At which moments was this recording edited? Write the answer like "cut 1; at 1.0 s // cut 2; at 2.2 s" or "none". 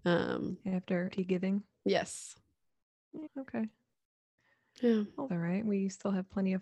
cut 1; at 1.1 s // cut 2; at 3.3 s // cut 3; at 5.3 s